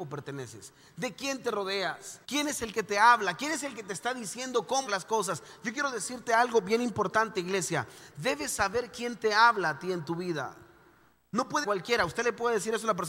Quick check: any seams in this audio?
yes; 3 cuts; at 2.2 s, 4.9 s, 11.6 s

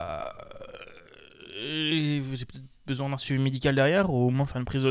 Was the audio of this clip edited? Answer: no; 0 cuts

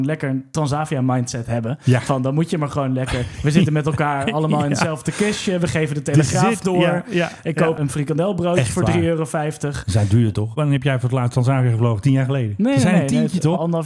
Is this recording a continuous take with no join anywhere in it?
yes; 0 cuts

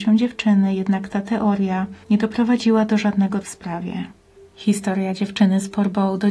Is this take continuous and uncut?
no; 3 cuts; at 2.0 s, 3.4 s, 4.4 s

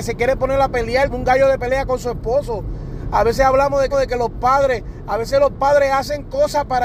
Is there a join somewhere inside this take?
yes; 2 cuts; at 1.1 s, 3.9 s

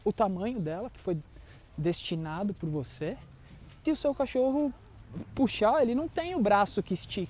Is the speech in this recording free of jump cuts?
no; 1 cut; at 3.8 s

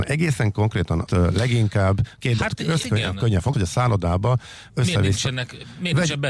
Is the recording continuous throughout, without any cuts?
no; 5 cuts; at 1.1 s, 2.4 s, 2.8 s, 3.5 s, 4.7 s

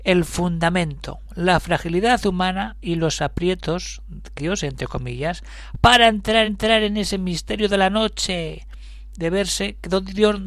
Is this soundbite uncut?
no; 2 cuts; at 4.4 s, 6.4 s

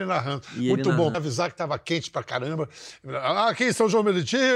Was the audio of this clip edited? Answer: yes; 1 cut; at 1.1 s

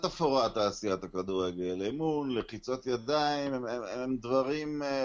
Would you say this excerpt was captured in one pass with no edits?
yes; 0 cuts

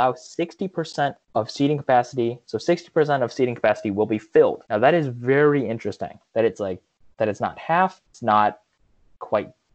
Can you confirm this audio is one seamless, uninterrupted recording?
no; 4 cuts; at 1.2 s, 4.7 s, 6.3 s, 8.1 s

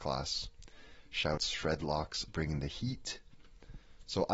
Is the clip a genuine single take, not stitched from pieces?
no; 2 cuts; at 1.4 s, 2.3 s

